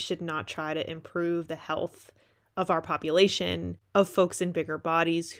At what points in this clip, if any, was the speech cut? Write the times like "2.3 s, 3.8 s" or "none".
none